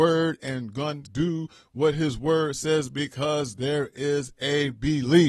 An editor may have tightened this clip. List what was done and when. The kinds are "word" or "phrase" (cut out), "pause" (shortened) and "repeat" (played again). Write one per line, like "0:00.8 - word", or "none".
0:01.0 - word